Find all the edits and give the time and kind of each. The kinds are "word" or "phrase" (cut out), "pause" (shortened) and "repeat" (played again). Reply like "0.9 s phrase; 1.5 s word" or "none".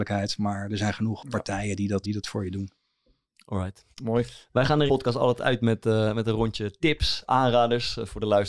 2.0 s word; 3.9 s pause; 4.9 s phrase